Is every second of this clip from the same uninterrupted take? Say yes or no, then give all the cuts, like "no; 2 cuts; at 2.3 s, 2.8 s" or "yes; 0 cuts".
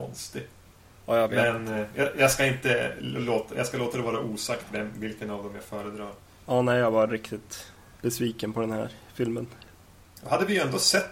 yes; 0 cuts